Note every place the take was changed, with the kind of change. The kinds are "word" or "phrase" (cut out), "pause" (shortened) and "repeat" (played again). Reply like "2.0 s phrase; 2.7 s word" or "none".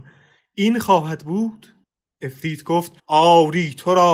1.8 s pause; 3.0 s pause